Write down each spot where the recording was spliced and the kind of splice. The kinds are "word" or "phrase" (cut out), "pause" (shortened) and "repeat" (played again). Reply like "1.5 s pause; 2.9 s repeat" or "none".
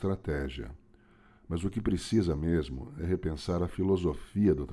none